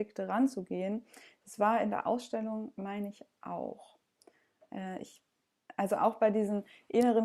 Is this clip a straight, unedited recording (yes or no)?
yes